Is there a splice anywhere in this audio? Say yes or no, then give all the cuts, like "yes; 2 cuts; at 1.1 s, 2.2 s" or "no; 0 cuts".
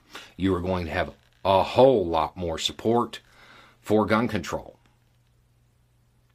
no; 0 cuts